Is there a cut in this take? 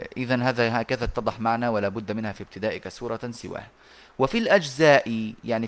no; 0 cuts

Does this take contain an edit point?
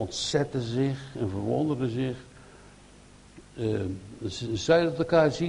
no; 0 cuts

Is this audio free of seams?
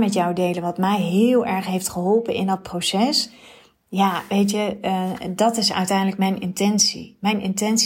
yes; 0 cuts

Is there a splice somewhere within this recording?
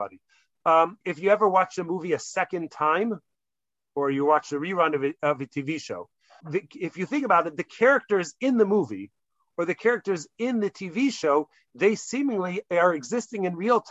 yes; 2 cuts; at 1.0 s, 6.4 s

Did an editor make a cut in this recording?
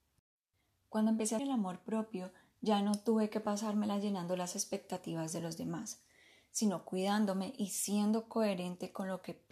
yes; 1 cut; at 1.4 s

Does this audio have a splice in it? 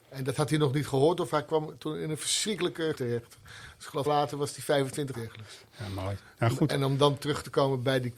yes; 3 cuts; at 2.9 s, 4.1 s, 5.1 s

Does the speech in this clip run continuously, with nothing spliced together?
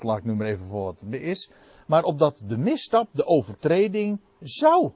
yes; 0 cuts

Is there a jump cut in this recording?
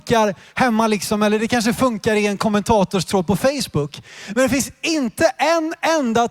no; 0 cuts

